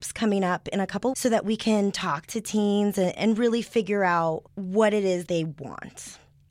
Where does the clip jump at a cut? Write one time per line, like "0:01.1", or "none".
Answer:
0:01.1
0:03.2
0:04.5
0:05.3